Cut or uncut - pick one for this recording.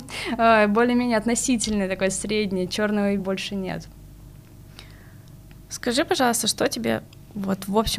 cut